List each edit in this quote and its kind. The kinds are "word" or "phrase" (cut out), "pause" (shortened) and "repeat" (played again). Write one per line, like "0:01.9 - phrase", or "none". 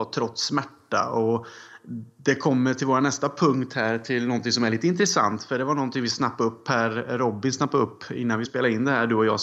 0:08.4 - word